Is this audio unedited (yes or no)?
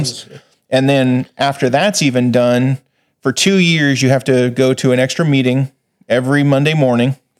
yes